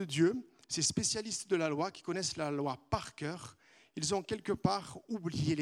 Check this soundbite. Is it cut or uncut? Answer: uncut